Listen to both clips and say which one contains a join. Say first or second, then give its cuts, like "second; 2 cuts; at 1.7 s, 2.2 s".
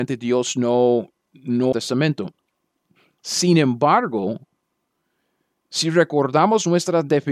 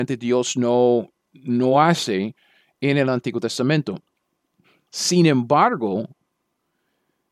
first; 1 cut; at 1.7 s